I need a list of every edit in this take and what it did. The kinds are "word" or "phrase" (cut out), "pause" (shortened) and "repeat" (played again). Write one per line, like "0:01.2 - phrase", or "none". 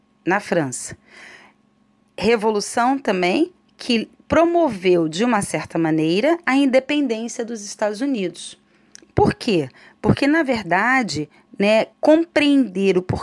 0:11.9 - pause